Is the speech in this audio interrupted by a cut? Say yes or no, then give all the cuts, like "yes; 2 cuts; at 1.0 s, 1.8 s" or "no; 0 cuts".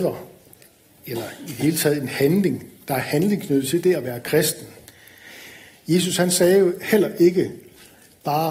no; 0 cuts